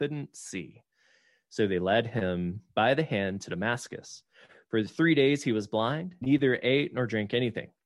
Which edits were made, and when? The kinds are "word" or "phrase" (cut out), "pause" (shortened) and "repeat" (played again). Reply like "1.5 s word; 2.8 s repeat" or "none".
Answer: 6.2 s word